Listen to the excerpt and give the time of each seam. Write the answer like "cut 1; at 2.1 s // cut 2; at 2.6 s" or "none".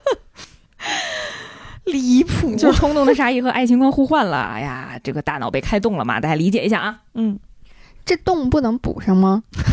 none